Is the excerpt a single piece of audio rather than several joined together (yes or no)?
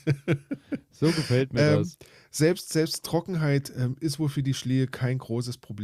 yes